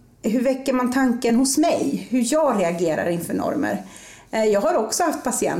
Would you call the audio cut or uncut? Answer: uncut